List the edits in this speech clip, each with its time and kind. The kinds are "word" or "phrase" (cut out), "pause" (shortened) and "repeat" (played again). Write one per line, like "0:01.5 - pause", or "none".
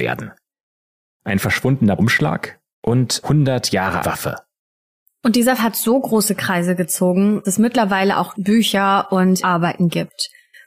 0:02.0 - word
0:03.2 - word
0:04.0 - word
0:05.6 - word
0:07.4 - word
0:08.3 - word
0:09.4 - word